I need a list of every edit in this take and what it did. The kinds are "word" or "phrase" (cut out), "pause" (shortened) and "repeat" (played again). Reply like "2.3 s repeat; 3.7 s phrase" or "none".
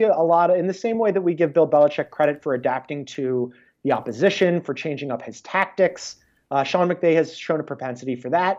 none